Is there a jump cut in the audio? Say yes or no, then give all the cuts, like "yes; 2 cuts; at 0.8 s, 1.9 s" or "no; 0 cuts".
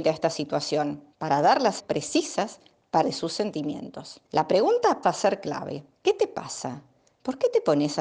yes; 6 cuts; at 1.1 s, 1.8 s, 3.0 s, 4.3 s, 5.0 s, 5.9 s